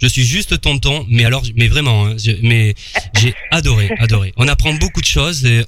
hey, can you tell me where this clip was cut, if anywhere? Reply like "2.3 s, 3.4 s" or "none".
none